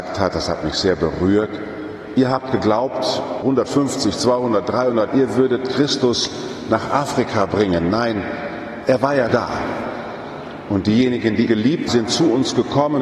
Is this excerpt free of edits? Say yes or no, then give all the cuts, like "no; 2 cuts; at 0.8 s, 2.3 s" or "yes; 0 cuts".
no; 5 cuts; at 3.4 s, 5.1 s, 9.3 s, 11.5 s, 11.9 s